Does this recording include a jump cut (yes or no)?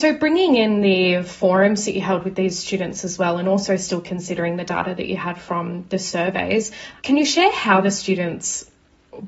yes